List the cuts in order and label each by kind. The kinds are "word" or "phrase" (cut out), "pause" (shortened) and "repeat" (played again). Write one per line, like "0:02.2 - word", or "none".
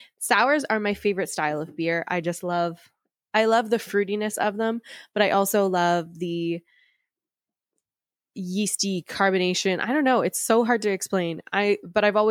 none